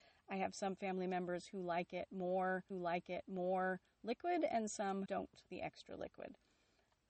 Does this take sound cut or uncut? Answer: cut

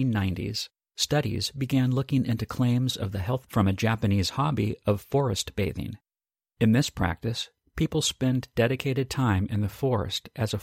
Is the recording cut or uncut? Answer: cut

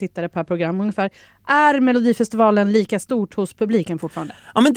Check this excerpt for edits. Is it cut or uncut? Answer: uncut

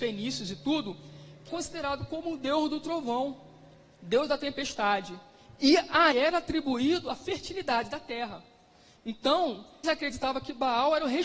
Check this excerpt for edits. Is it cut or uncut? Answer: cut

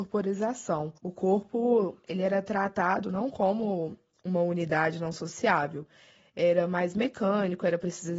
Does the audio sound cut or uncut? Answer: cut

